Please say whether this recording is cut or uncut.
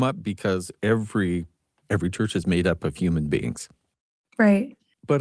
uncut